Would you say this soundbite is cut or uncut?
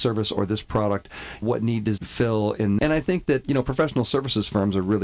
cut